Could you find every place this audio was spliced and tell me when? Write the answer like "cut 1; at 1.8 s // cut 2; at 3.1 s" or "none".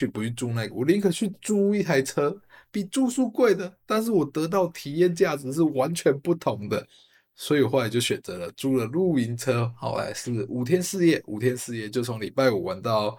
none